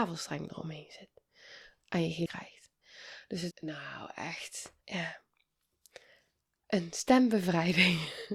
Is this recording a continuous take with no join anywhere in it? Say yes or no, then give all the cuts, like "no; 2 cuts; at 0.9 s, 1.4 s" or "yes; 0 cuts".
no; 3 cuts; at 2.3 s, 3.5 s, 4.8 s